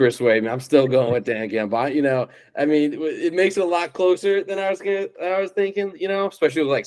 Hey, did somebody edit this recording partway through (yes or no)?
no